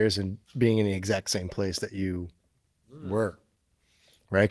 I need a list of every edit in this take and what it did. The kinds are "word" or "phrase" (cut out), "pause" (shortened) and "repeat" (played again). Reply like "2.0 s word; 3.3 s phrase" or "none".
none